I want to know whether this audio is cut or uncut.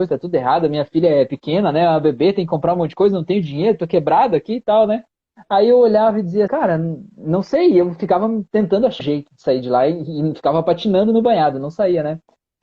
cut